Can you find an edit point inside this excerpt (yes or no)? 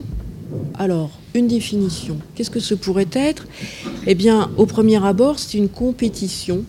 no